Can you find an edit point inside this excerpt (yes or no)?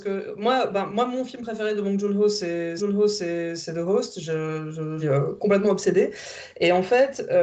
yes